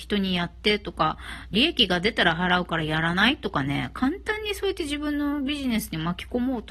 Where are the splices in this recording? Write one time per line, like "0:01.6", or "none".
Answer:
0:01.5